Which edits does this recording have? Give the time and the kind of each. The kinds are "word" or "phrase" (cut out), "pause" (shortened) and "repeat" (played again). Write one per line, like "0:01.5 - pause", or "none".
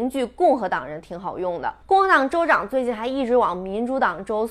0:01.8 - pause